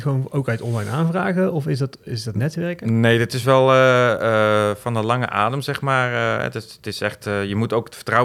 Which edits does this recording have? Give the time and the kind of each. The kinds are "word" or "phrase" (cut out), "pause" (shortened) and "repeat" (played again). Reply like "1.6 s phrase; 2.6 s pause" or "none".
none